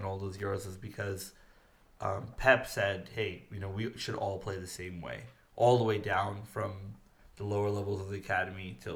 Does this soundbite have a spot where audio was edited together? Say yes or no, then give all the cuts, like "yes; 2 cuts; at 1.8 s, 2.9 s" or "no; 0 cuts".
no; 0 cuts